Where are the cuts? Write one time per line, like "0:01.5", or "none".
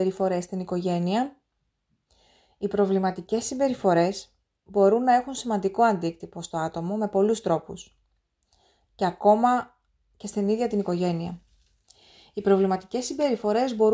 none